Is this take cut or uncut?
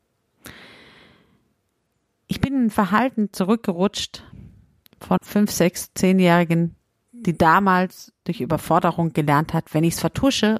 cut